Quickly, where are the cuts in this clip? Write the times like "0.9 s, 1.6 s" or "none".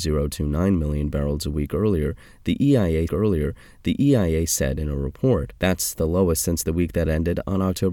3.1 s, 5.6 s